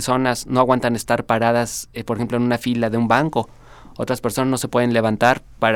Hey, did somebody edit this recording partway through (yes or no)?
no